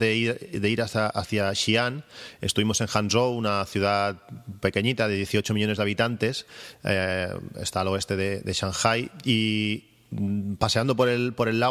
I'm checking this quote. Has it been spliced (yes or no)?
no